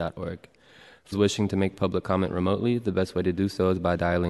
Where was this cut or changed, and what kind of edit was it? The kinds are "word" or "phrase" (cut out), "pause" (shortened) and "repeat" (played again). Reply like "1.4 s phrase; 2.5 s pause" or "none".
1.1 s word